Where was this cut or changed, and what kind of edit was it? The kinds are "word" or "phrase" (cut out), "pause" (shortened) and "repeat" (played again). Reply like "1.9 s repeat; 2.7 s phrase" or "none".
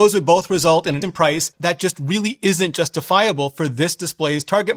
1.0 s word